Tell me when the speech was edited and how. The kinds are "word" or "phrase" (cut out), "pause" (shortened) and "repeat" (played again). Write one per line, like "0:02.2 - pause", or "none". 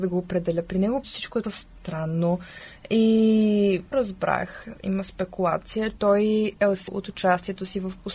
0:01.0 - word
0:01.4 - word
0:03.9 - word
0:06.0 - word
0:06.9 - word